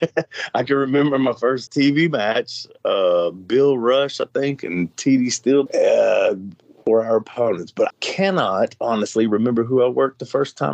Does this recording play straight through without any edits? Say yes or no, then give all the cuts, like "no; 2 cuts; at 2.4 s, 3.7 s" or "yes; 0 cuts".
no; 3 cuts; at 1.7 s, 5.7 s, 7.9 s